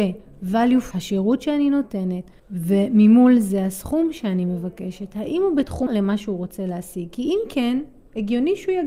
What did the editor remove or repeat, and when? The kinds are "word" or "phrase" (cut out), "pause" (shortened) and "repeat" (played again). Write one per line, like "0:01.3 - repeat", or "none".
0:00.9 - phrase
0:02.4 - pause
0:05.9 - word